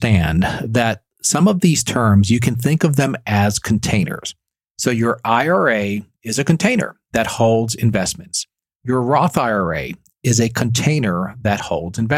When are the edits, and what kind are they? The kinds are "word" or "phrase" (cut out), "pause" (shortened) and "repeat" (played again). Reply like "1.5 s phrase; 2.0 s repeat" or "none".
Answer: none